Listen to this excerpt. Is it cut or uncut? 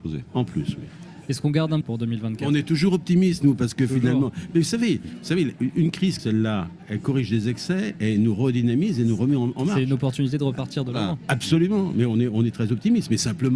cut